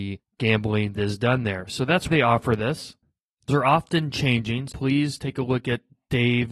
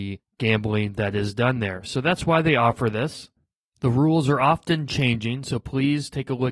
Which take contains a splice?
first; 4 cuts; at 0.9 s, 2.1 s, 3.5 s, 4.7 s

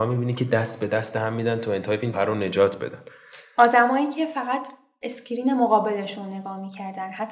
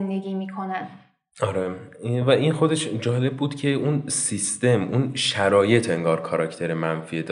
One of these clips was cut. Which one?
first; 1 cut; at 2.1 s

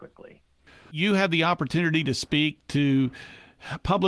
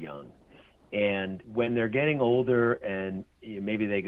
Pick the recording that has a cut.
second; 1 cut; at 1.4 s

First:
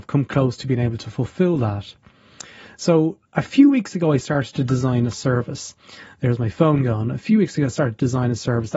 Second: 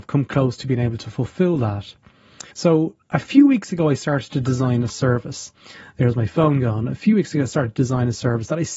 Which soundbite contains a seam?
second; 1 cut; at 2.5 s

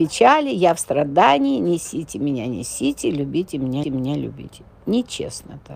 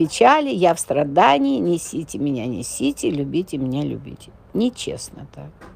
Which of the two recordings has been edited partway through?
first; 1 cut; at 3.8 s

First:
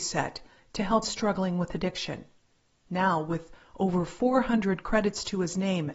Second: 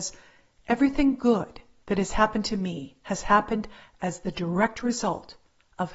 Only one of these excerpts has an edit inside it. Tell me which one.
first; 1 cut; at 1.0 s

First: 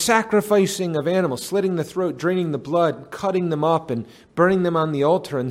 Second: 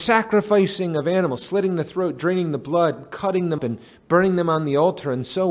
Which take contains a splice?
second; 1 cut; at 3.6 s

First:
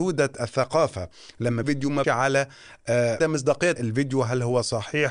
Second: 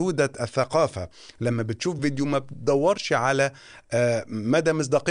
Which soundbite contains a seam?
first; 4 cuts; at 1.6 s, 2.0 s, 3.2 s, 3.8 s

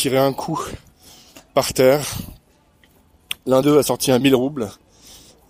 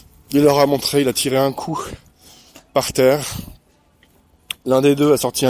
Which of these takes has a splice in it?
first; 2 cuts; at 3.6 s, 4.2 s

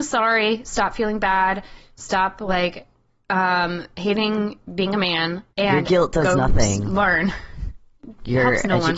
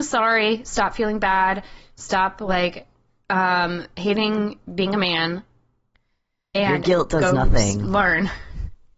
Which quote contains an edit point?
first; 1 cut; at 5.5 s

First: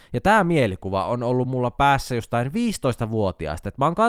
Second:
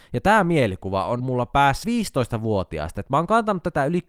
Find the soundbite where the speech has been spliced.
second; 2 cuts; at 1.2 s, 1.8 s

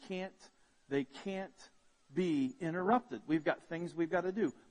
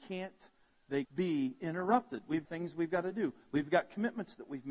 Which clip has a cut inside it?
second; 2 cuts; at 1.1 s, 2.4 s

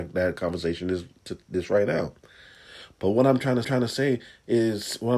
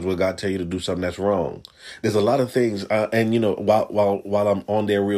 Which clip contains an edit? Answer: first; 1 cut; at 3.6 s

